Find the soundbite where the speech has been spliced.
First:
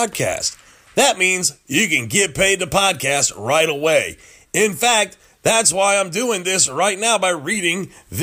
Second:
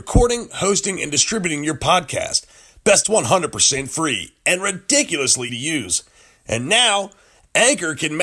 second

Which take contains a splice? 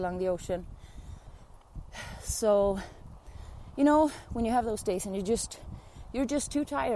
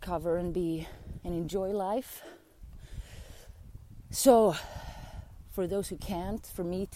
second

